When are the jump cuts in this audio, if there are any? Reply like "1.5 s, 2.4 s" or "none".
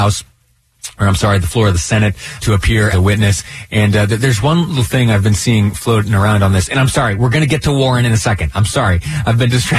2.4 s, 2.9 s, 8.7 s